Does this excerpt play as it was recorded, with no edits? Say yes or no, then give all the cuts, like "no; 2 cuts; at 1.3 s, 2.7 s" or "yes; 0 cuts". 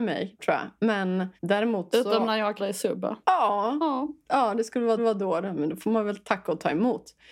no; 4 cuts; at 1.4 s, 2.6 s, 3.2 s, 5.0 s